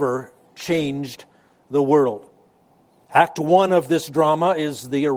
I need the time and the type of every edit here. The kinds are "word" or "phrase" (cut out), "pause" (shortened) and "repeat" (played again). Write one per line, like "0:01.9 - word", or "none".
none